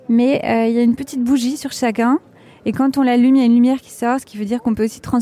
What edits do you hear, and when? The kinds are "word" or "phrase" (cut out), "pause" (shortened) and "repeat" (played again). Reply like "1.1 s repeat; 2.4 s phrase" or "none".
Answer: none